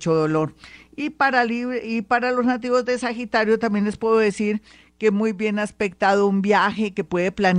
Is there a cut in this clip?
no; 0 cuts

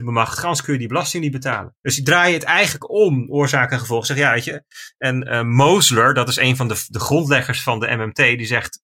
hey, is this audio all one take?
no; 1 cut; at 1.8 s

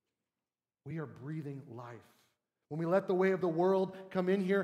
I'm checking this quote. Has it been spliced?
no; 0 cuts

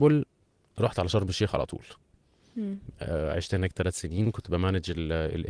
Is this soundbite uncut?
yes; 0 cuts

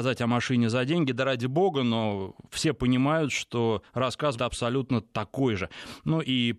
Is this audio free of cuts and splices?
no; 1 cut; at 4.4 s

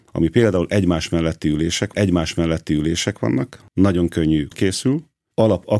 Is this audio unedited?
no; 2 cuts; at 1.9 s, 4.5 s

